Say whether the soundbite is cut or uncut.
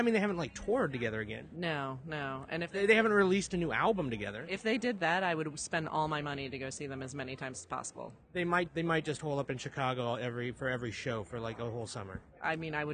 cut